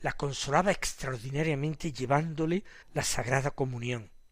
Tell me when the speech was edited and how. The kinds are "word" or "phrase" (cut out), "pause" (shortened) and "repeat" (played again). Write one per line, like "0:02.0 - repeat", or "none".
0:02.8 - pause